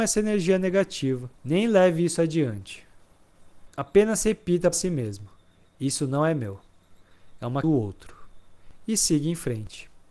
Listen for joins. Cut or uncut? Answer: cut